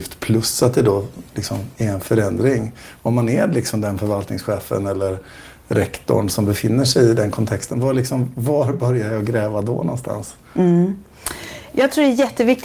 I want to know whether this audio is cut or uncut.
cut